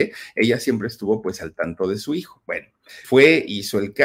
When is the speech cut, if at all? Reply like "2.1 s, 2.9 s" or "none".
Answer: 3.0 s